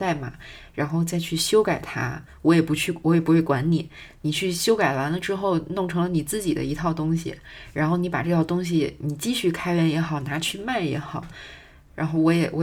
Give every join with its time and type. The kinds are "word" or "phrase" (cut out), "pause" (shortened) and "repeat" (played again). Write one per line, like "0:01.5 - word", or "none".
none